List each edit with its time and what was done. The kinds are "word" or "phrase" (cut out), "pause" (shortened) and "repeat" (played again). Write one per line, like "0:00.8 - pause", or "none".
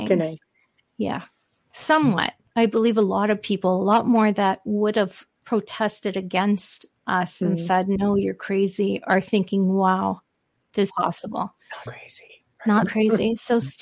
0:05.3 - pause
0:10.9 - phrase
0:11.9 - word
0:12.8 - word